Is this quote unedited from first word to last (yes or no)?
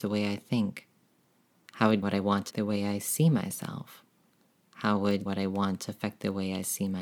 no